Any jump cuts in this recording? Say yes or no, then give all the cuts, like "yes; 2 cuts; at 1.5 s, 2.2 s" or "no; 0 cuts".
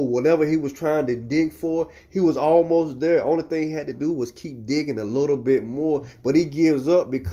no; 0 cuts